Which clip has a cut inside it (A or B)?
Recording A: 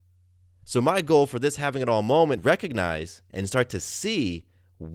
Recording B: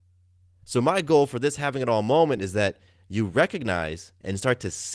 A